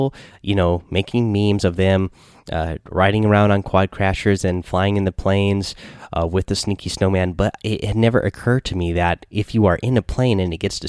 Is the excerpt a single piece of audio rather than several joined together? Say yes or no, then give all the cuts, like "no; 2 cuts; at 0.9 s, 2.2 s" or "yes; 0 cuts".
yes; 0 cuts